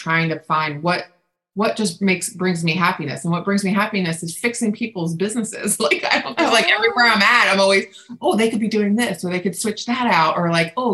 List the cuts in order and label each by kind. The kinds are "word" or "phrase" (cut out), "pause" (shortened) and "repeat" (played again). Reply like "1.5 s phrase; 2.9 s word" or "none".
none